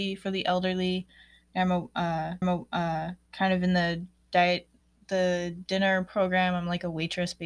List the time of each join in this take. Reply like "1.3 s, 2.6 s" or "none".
2.4 s, 4.8 s

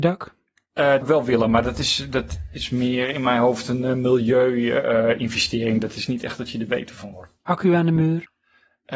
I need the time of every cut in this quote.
1.0 s, 7.4 s

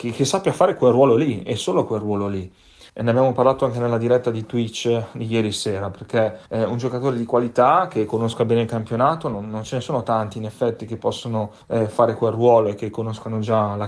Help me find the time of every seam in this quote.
2.9 s, 6.5 s, 11.6 s

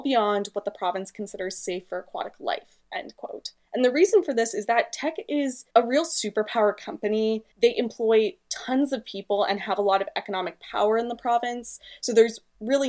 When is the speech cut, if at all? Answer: 3.6 s, 5.7 s, 7.5 s

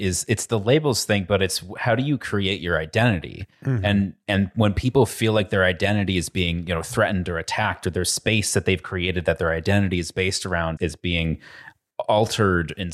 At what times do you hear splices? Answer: 10.8 s

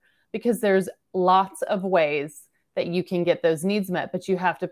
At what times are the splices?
none

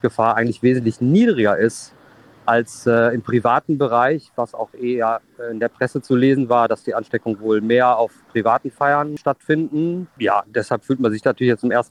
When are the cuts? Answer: none

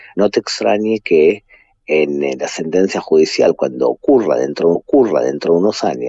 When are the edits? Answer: 4.8 s

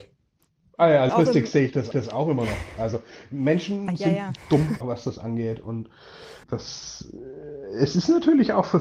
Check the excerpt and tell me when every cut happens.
1.1 s, 1.9 s, 3.9 s, 4.8 s, 6.4 s

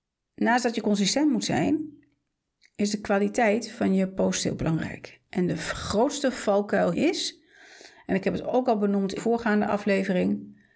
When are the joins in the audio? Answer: 6.9 s, 9.2 s

